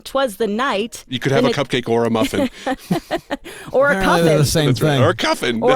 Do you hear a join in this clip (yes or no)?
no